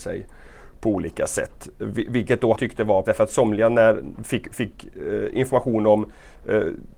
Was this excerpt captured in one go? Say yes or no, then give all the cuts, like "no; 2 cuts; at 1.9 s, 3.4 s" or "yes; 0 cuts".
no; 2 cuts; at 2.5 s, 3.0 s